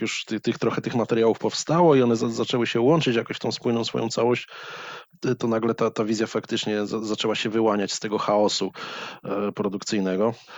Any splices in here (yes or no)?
no